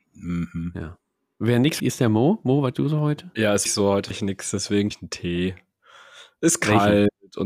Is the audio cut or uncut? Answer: cut